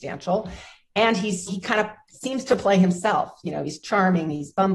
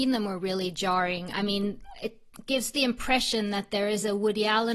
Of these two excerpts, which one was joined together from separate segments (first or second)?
first